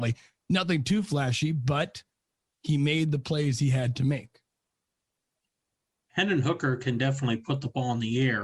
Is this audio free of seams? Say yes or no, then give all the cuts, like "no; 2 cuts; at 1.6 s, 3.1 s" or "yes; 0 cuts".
yes; 0 cuts